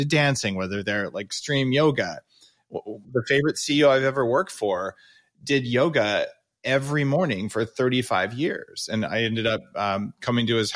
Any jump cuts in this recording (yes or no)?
no